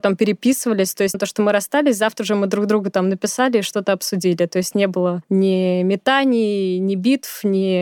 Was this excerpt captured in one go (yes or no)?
no